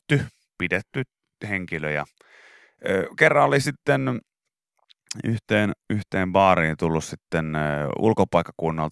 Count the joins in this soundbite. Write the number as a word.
zero